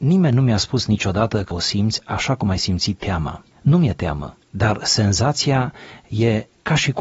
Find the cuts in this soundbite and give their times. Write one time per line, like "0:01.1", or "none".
0:01.5